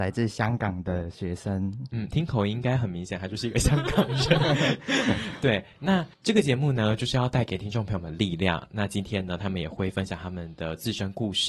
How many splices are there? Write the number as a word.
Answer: one